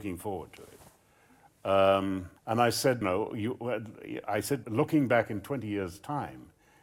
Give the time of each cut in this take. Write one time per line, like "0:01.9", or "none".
0:02.4
0:03.0
0:04.6